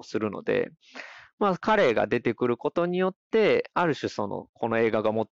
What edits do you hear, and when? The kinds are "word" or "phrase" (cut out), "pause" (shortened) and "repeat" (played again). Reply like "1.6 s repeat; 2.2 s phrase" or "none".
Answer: none